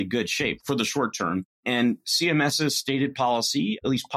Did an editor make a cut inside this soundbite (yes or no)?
no